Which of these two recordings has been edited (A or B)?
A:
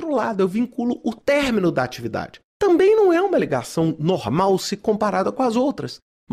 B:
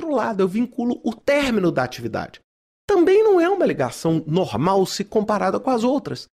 A